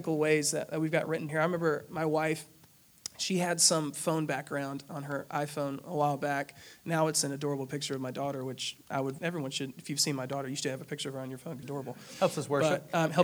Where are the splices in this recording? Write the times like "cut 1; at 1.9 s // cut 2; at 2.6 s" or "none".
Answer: cut 1; at 1.3 s // cut 2; at 9.2 s // cut 3; at 11.6 s